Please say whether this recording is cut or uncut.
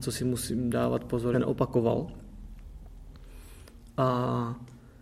cut